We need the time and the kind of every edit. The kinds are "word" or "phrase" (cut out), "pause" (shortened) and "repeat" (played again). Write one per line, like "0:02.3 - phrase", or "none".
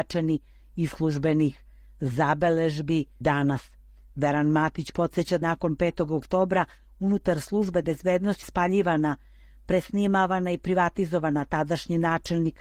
0:03.2 - word
0:05.4 - word
0:07.8 - word
0:08.4 - word